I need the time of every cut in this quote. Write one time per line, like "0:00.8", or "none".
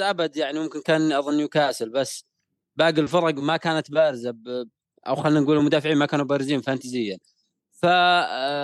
none